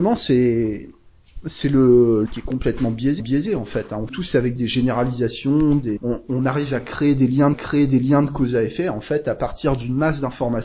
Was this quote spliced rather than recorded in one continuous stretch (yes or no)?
yes